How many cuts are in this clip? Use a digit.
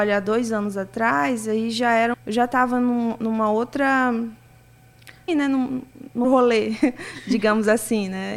3